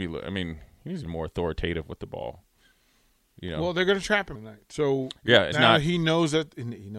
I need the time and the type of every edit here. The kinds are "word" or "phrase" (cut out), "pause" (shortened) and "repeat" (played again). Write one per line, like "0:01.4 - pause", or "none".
0:01.1 - phrase
0:04.4 - word
0:05.5 - word